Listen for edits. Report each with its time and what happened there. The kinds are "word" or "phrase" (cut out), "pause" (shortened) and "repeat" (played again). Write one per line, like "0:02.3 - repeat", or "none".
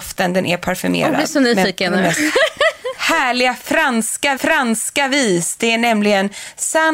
0:04.4 - repeat